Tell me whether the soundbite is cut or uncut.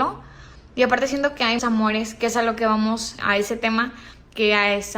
cut